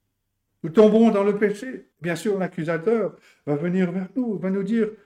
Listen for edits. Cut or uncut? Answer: cut